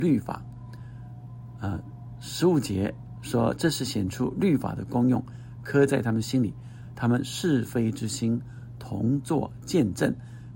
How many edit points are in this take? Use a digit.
1